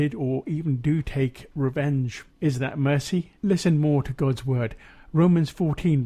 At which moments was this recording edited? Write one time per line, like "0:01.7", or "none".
0:02.3
0:03.4